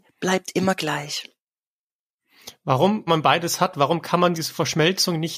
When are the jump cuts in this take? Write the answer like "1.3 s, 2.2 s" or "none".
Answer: 3.1 s, 4.3 s